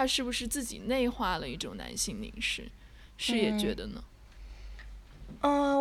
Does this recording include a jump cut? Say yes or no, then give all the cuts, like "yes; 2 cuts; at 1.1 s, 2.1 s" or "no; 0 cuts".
no; 0 cuts